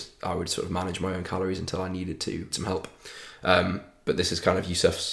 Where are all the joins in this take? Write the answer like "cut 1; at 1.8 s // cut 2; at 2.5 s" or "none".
cut 1; at 2.5 s